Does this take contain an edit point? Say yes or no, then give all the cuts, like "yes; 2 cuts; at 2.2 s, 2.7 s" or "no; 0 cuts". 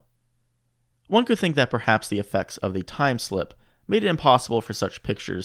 no; 0 cuts